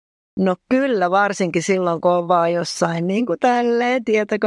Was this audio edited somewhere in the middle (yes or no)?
no